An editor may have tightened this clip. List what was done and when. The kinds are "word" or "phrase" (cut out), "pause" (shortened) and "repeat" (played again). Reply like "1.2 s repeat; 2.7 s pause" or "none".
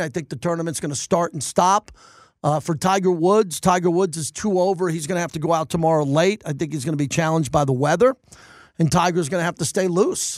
none